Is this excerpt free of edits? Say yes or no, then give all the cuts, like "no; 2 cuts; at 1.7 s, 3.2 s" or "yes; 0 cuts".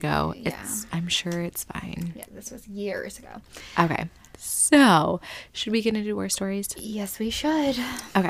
yes; 0 cuts